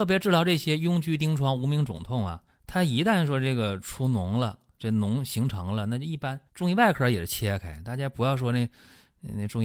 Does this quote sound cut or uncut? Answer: cut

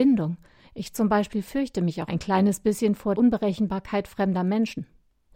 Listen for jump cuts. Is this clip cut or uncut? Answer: cut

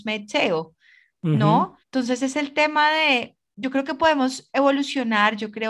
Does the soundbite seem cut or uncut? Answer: cut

